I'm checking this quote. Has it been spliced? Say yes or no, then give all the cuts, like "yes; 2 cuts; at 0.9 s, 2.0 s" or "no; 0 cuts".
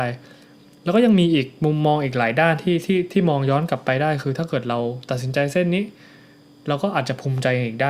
no; 0 cuts